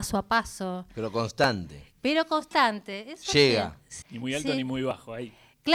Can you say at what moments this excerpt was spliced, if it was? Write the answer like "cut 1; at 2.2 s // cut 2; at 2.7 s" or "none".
cut 1; at 4.0 s